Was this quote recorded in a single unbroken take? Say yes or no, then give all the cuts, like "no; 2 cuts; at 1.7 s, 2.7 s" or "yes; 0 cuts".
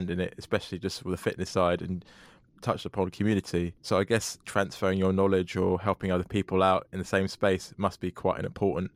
no; 3 cuts; at 2.5 s, 3.8 s, 4.4 s